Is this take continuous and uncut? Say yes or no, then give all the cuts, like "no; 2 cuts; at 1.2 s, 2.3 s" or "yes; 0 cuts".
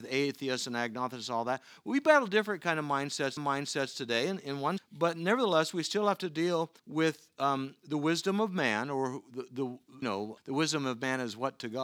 no; 5 cuts; at 3.4 s, 4.8 s, 6.8 s, 10.0 s, 10.4 s